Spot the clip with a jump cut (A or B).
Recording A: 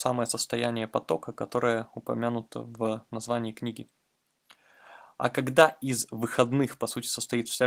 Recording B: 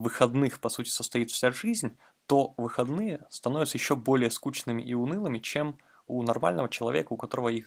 A